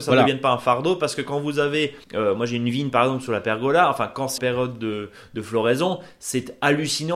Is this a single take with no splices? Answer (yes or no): no